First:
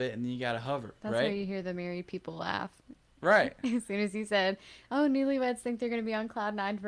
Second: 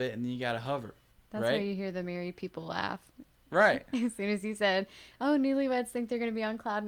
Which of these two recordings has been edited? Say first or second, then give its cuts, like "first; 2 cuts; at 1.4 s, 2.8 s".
first; 1 cut; at 1.0 s